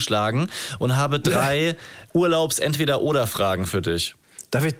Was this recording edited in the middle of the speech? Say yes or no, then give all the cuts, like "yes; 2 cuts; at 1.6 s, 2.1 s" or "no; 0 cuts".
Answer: yes; 1 cut; at 2.1 s